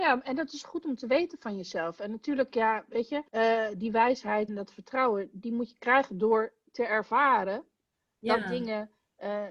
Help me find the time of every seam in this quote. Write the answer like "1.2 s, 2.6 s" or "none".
3.3 s, 4.5 s